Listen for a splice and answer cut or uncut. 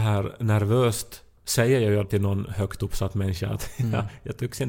cut